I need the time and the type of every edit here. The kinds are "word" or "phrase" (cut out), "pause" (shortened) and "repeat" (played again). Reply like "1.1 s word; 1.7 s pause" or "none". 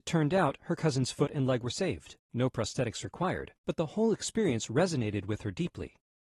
2.2 s pause; 3.6 s pause